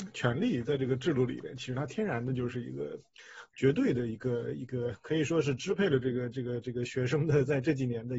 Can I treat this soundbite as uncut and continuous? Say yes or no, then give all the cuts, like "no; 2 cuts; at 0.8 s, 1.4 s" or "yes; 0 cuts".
no; 1 cut; at 3.5 s